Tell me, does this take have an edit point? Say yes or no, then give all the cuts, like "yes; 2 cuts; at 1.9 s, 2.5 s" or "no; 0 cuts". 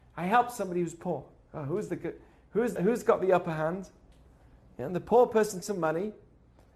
yes; 2 cuts; at 2.8 s, 5.6 s